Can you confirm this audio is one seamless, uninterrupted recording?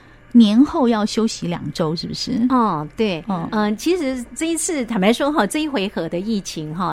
yes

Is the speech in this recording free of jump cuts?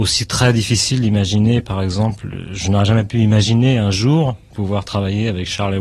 yes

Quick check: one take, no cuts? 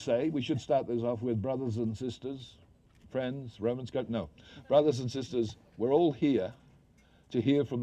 yes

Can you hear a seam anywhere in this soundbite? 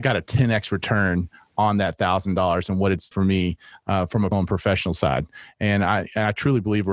yes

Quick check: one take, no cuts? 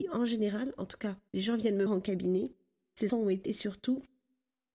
no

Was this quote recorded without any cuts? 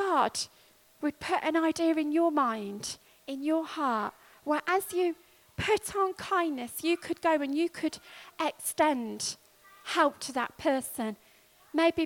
yes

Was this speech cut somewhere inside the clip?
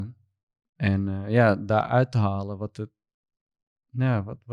no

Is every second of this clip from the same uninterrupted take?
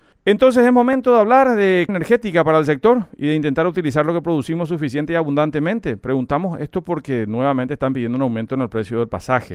no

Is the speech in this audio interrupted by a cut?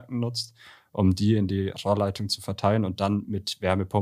no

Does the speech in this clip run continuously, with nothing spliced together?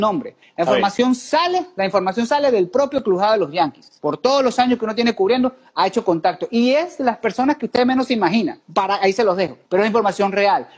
no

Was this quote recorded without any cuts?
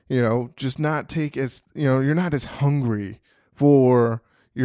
yes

